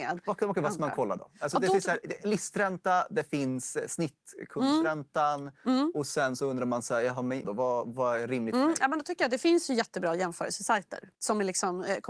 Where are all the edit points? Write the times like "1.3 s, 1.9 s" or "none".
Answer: 7.4 s, 11.1 s